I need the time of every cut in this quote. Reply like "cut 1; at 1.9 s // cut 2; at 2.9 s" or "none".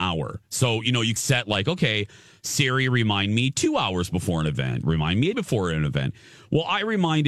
cut 1; at 1.2 s // cut 2; at 4.8 s // cut 3; at 5.3 s